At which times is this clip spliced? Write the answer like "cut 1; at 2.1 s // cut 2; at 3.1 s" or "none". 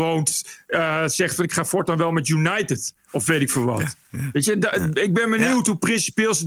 none